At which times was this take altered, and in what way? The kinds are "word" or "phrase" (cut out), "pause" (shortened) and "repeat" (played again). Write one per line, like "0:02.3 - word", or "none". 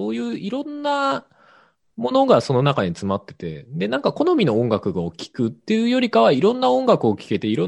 none